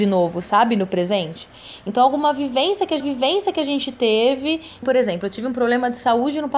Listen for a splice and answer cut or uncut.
cut